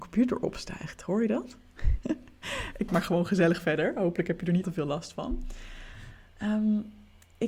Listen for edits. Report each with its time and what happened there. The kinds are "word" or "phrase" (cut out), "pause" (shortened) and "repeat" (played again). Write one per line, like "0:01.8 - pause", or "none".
0:02.9 - word
0:04.6 - word